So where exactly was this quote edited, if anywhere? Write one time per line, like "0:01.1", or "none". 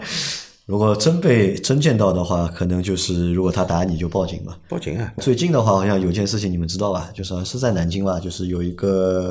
0:05.2

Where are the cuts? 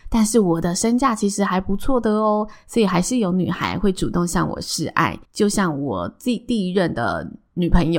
0:05.2

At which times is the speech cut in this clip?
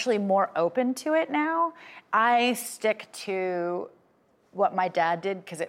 none

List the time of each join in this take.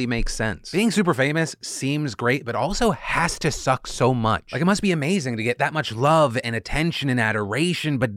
none

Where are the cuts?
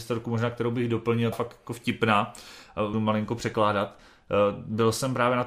0:01.3
0:02.9

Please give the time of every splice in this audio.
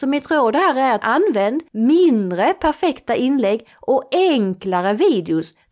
0:01.0
0:01.7

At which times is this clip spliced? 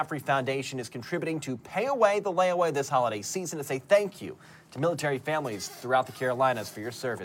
none

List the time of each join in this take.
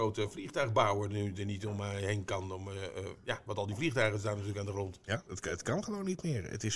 0:05.3

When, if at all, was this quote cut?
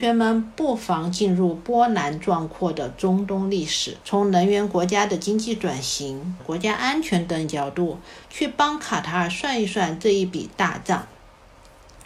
0:04.0
0:06.4

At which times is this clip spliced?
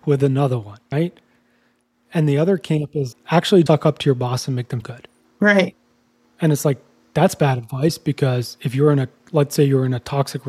0:00.9
0:03.1
0:03.7
0:04.8

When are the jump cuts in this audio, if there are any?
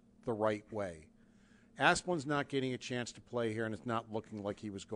none

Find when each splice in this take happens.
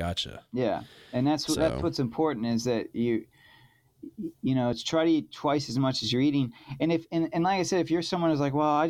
none

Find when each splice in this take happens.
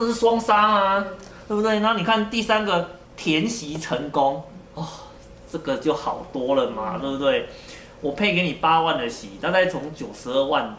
0:03.0
0:04.7

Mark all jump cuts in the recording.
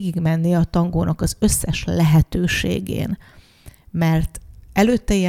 none

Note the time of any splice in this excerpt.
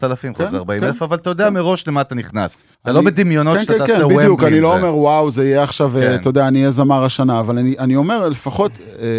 0:02.7

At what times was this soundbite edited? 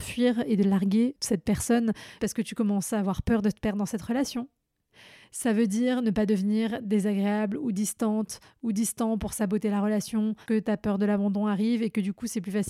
0:01.2
0:02.2
0:10.5

